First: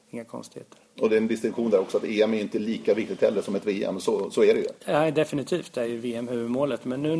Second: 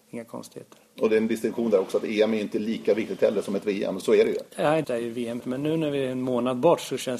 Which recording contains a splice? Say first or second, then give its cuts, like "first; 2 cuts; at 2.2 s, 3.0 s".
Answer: second; 3 cuts; at 4.0 s, 4.8 s, 5.4 s